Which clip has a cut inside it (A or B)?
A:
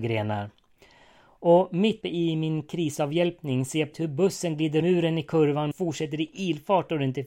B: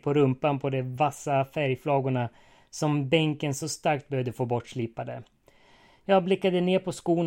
A